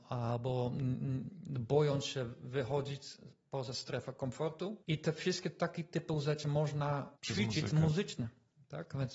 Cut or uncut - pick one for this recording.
cut